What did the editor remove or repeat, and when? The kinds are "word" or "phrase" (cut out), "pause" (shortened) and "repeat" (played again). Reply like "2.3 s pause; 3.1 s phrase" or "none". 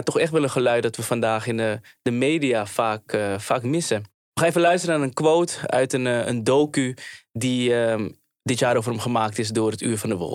none